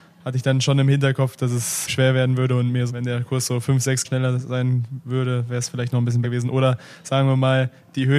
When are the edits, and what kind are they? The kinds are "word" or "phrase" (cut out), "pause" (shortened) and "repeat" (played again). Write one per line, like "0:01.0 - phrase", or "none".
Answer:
0:01.9 - word
0:02.9 - word
0:04.0 - word
0:06.2 - word